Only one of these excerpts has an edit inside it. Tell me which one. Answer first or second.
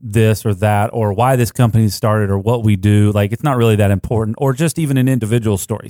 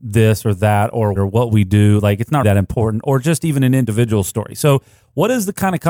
second